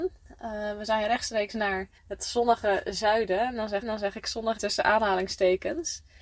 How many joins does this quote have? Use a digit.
3